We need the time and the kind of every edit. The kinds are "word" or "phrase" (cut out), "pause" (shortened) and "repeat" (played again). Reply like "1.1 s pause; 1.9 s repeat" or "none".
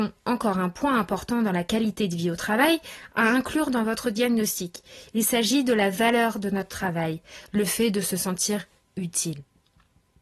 none

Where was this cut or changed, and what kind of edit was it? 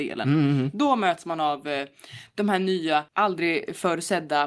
3.1 s pause

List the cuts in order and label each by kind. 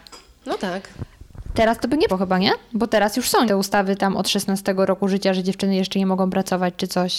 2.1 s word; 3.5 s word

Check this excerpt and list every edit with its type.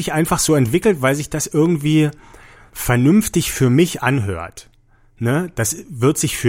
none

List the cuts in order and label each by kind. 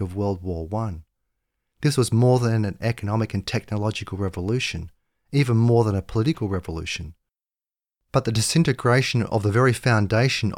none

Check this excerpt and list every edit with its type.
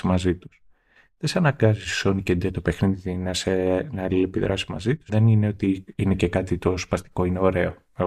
5.1 s word; 5.9 s pause

